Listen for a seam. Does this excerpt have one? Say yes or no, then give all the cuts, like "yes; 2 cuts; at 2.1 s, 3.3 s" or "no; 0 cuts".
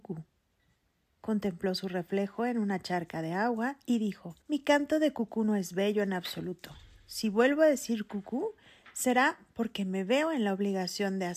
yes; 1 cut; at 4.4 s